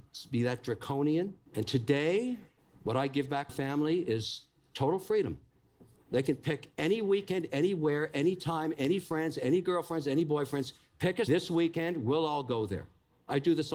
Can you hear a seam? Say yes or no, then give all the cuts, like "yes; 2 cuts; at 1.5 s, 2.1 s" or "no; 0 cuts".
yes; 5 cuts; at 1.5 s, 2.6 s, 3.5 s, 6.0 s, 11.3 s